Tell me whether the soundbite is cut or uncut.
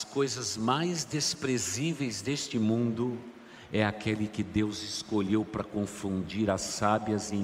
uncut